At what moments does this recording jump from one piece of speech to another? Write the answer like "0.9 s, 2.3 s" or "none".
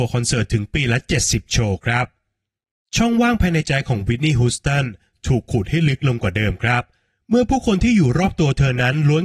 none